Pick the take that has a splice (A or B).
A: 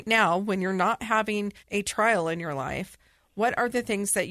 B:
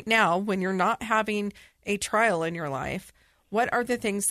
A